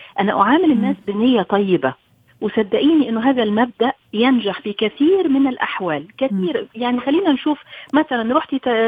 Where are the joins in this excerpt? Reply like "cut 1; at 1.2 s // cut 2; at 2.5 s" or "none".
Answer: none